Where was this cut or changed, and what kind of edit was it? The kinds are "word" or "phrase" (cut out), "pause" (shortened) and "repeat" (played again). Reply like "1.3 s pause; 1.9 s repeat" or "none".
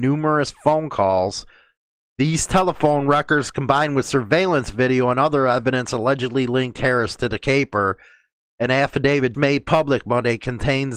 9.3 s word